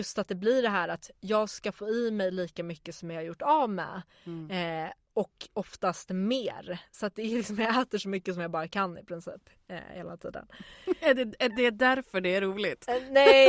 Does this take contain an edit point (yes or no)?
no